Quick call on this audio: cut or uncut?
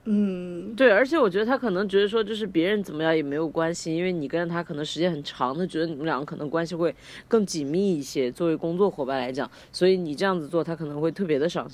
uncut